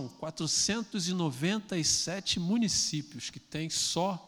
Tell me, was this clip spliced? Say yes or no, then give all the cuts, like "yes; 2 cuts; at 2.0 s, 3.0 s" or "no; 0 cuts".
no; 0 cuts